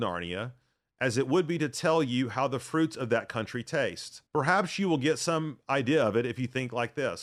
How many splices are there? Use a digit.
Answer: 1